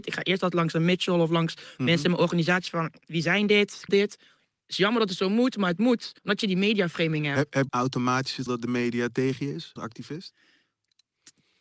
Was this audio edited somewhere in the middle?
yes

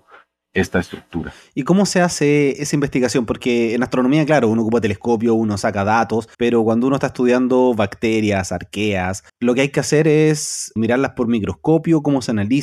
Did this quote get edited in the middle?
yes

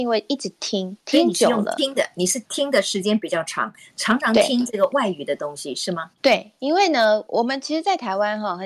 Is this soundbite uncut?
no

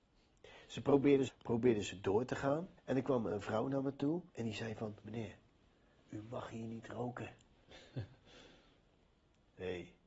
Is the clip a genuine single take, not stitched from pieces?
no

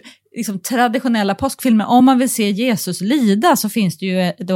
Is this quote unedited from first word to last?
yes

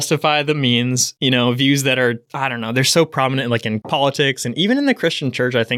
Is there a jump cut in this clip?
no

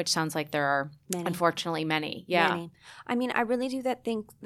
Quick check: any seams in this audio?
yes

